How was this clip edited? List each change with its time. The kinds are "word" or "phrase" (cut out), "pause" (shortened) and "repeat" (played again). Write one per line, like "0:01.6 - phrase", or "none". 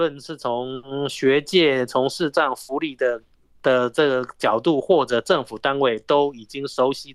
none